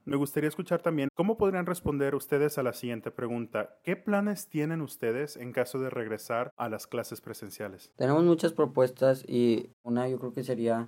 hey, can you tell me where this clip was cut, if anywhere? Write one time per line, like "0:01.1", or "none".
0:07.9